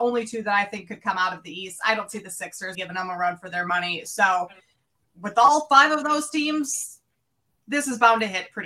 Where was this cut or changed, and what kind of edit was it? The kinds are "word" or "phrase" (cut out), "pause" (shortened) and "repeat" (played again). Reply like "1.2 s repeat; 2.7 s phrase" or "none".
2.7 s word